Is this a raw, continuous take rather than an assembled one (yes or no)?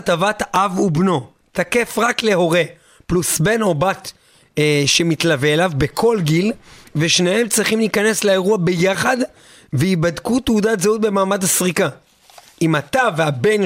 yes